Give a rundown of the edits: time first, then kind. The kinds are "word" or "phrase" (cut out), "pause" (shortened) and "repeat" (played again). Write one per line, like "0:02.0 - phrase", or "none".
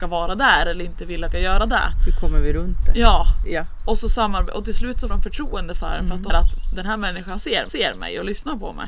0:01.3 - phrase
0:05.1 - word
0:06.3 - word
0:07.7 - repeat